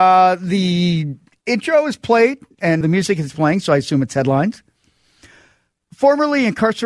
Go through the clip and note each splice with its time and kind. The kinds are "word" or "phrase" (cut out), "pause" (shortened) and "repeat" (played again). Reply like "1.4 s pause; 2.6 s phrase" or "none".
2.8 s word